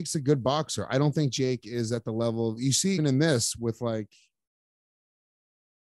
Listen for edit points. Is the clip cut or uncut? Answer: cut